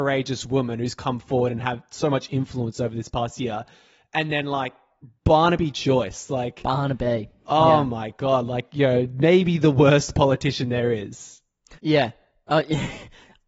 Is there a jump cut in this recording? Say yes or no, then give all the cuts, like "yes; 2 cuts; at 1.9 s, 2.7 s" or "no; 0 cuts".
yes; 1 cut; at 11.8 s